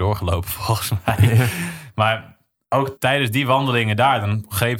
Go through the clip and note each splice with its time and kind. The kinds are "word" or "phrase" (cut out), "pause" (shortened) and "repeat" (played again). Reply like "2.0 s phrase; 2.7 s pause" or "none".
3.0 s word